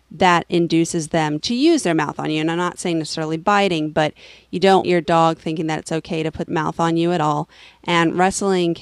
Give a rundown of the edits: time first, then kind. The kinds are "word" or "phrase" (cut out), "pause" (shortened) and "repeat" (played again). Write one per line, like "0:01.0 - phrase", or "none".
0:01.4 - word
0:04.8 - word
0:06.5 - word